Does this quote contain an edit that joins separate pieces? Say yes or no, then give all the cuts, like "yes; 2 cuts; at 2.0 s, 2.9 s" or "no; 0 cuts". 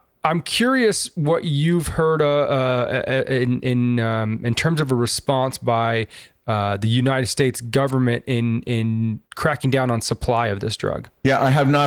yes; 1 cut; at 9.2 s